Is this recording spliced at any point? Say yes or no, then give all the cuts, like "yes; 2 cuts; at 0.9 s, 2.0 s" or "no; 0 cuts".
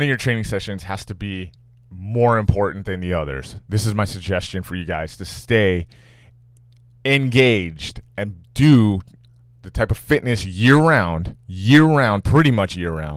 no; 0 cuts